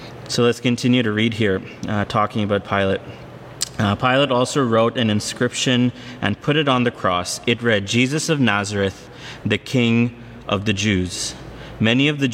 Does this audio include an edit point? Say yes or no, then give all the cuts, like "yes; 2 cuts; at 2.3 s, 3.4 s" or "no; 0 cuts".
no; 0 cuts